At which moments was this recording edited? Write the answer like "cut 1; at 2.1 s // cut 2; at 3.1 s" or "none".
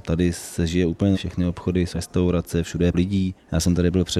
cut 1; at 1.1 s // cut 2; at 1.9 s // cut 3; at 2.9 s